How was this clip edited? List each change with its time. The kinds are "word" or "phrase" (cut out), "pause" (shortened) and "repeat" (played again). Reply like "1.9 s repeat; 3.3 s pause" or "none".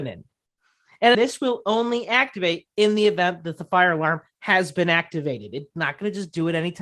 1.1 s word

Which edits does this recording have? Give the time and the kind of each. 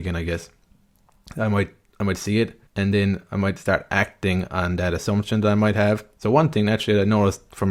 2.7 s pause

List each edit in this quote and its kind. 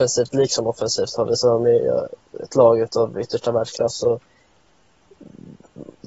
none

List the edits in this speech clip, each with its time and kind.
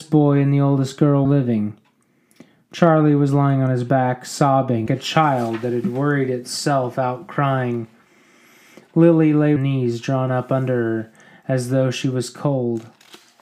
1.2 s word; 4.9 s phrase; 9.6 s phrase

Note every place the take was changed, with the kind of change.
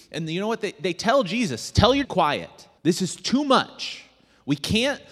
2.0 s phrase; 2.8 s pause

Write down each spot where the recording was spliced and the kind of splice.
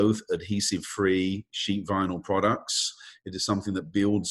none

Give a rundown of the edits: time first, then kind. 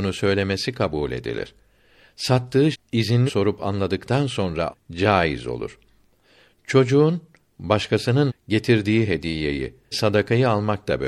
2.7 s word; 3.3 s word; 4.7 s word; 8.3 s word; 9.9 s word

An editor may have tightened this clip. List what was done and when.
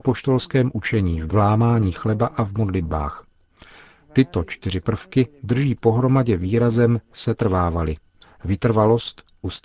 1.3 s phrase

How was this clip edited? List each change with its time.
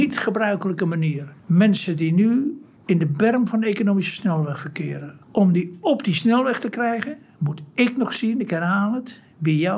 1.4 s pause; 2.8 s pause; 5.2 s pause

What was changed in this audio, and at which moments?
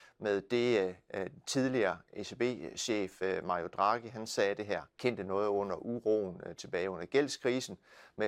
4.9 s pause

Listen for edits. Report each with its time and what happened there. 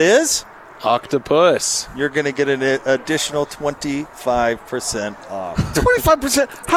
none

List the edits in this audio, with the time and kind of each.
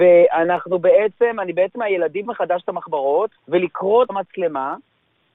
1.7 s word; 2.2 s word; 3.4 s pause; 4.1 s word

